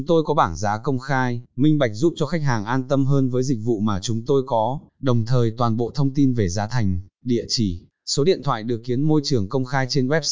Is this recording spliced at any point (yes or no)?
yes